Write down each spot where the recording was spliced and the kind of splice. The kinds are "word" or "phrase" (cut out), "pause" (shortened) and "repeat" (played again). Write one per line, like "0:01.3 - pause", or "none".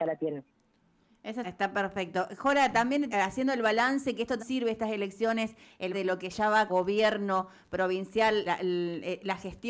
0:01.4 - word
0:03.1 - word
0:04.4 - word
0:05.9 - word
0:06.7 - word
0:08.5 - word